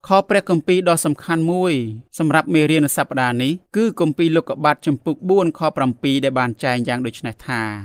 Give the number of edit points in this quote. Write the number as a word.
two